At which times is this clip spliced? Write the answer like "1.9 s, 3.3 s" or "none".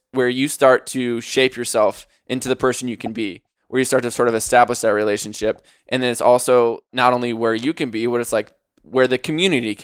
none

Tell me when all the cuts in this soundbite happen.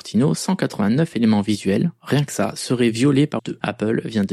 3.4 s

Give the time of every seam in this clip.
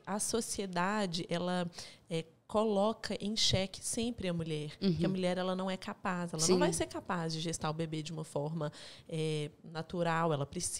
none

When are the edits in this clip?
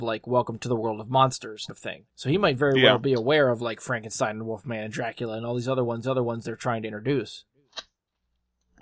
1.7 s, 2.1 s, 6.0 s

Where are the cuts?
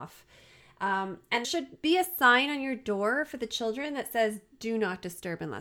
1.4 s

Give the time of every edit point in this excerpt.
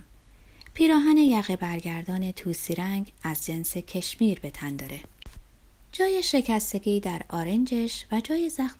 none

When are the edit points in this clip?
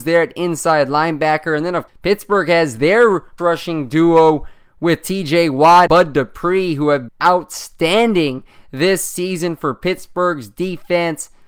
1.9 s, 3.4 s, 5.9 s, 7.1 s

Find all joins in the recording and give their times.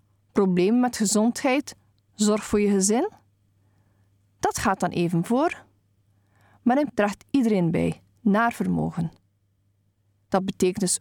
6.9 s

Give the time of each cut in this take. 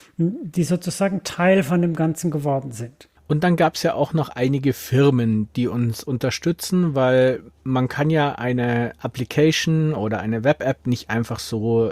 3.2 s

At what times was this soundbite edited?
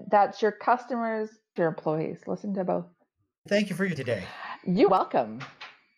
1.6 s, 3.5 s, 4.0 s, 4.9 s

